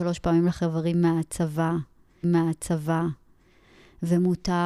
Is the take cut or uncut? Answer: cut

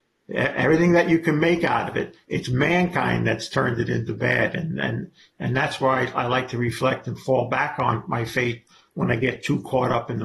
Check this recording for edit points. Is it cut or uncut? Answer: uncut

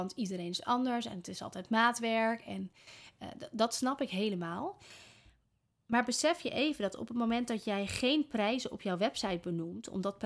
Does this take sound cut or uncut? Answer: uncut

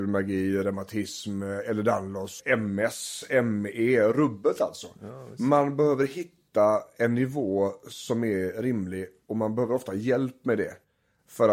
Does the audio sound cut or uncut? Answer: uncut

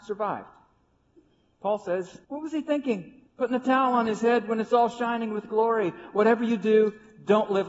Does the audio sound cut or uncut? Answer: cut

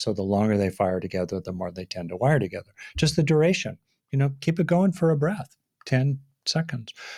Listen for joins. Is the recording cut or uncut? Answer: uncut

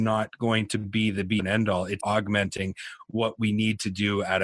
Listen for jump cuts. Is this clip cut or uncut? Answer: cut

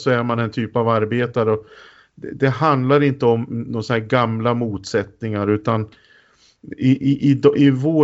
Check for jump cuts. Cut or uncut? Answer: uncut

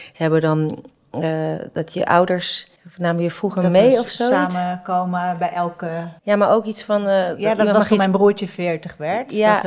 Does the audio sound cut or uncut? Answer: cut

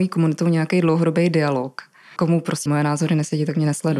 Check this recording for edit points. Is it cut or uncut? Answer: cut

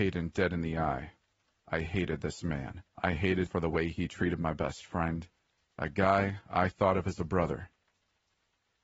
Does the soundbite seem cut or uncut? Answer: cut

